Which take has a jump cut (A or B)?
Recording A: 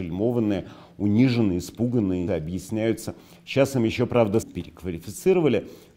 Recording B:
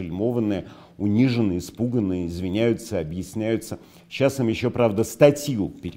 A